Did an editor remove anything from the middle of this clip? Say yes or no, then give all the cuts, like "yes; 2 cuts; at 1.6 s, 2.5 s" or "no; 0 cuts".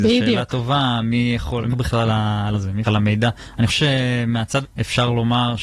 yes; 6 cuts; at 1.7 s, 2.1 s, 2.5 s, 2.8 s, 3.7 s, 4.6 s